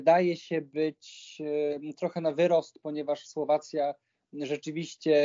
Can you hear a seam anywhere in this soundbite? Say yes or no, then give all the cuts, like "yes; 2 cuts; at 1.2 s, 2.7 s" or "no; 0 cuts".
no; 0 cuts